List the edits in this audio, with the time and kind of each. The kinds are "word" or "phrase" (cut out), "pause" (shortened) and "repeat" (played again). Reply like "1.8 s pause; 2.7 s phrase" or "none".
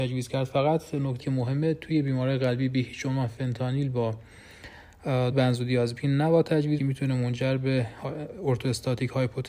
1.2 s word; 5.3 s word; 6.8 s phrase